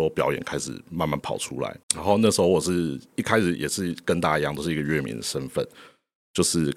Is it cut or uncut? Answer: cut